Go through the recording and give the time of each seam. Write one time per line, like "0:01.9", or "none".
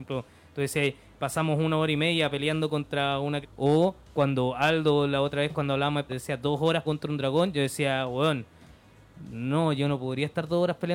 0:03.4
0:04.0
0:06.1
0:06.9